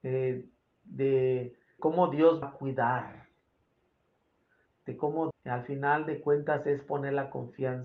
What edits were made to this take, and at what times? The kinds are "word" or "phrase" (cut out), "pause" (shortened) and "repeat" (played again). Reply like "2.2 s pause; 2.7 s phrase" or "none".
1.8 s word; 2.4 s word; 5.3 s word